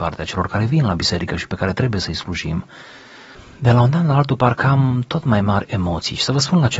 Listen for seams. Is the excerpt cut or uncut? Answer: uncut